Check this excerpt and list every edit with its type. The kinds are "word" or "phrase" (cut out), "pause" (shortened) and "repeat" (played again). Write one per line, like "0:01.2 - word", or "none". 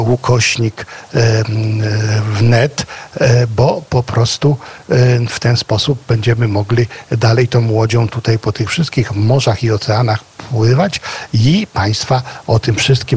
none